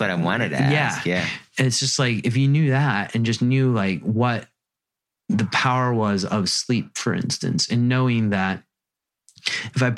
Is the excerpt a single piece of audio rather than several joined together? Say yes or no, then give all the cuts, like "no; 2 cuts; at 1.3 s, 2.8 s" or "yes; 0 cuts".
yes; 0 cuts